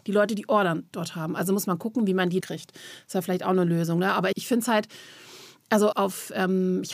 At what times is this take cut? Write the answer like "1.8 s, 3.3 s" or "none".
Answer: 2.4 s, 4.3 s, 5.9 s